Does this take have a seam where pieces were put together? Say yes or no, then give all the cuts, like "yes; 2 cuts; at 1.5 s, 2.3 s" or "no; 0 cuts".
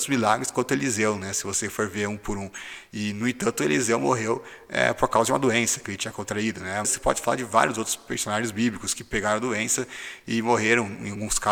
yes; 1 cut; at 6.8 s